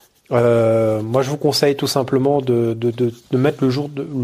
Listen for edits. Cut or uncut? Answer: uncut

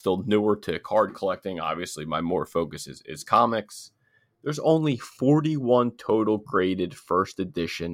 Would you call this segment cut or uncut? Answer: uncut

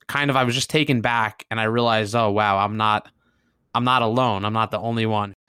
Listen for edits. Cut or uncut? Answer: uncut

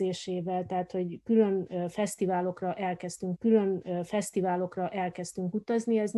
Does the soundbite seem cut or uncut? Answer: cut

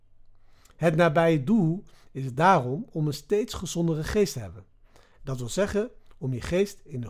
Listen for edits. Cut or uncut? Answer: uncut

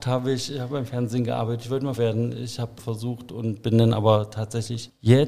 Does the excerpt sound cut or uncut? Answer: cut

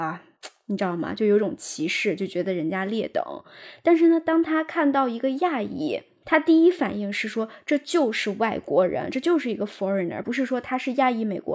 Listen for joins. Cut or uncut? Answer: uncut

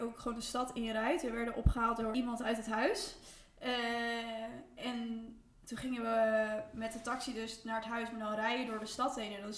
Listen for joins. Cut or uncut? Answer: uncut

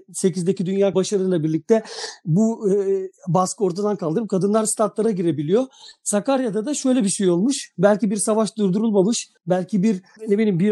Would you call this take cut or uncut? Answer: cut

